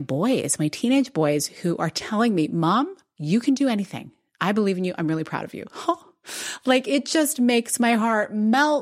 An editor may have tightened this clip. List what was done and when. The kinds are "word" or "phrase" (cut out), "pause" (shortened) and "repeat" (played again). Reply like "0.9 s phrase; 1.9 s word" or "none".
none